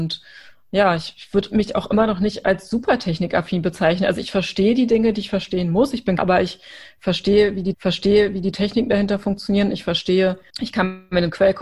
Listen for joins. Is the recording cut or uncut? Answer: cut